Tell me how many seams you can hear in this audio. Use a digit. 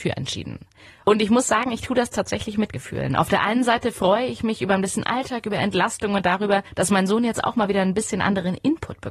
1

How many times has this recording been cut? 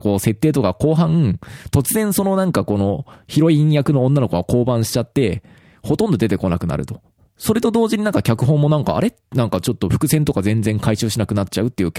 0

